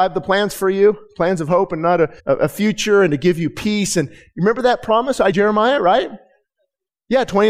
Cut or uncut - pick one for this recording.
cut